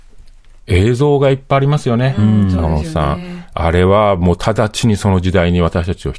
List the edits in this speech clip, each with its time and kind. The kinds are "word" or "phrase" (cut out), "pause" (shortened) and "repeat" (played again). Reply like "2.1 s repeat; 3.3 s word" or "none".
none